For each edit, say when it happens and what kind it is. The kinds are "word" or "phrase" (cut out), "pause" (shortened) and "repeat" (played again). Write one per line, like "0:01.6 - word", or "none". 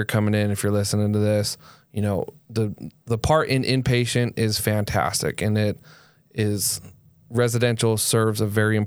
none